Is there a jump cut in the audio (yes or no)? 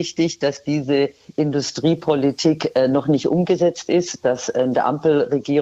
no